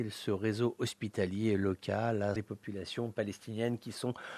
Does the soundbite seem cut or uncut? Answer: cut